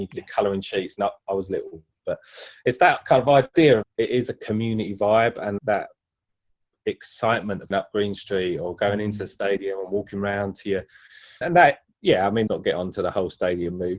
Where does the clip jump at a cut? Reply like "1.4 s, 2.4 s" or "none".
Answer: 2.0 s, 3.8 s, 5.6 s, 7.7 s, 11.4 s, 12.5 s

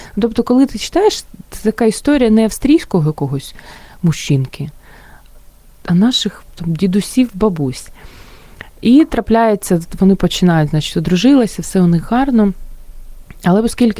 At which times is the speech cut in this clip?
6.5 s

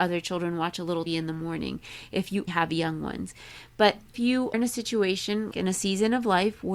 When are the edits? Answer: 1.1 s, 2.5 s, 4.1 s, 4.5 s, 5.5 s

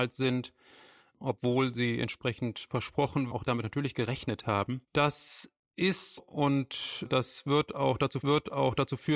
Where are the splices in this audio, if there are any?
3.3 s, 4.8 s, 6.2 s, 8.2 s

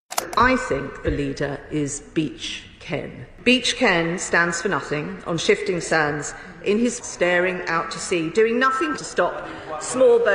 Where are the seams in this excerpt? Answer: 1.0 s, 7.0 s, 9.0 s

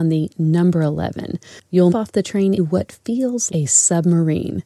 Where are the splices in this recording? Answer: 1.9 s, 2.6 s, 3.5 s

